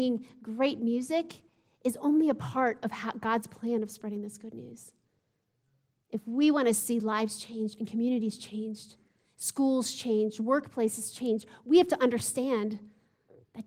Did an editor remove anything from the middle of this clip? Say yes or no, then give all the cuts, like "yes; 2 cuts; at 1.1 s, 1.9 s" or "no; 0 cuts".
no; 0 cuts